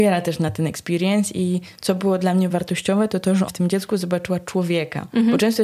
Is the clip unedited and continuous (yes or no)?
no